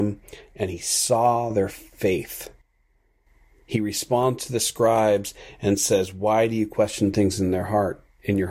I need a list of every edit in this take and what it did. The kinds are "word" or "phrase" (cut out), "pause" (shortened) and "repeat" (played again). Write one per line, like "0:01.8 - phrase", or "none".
none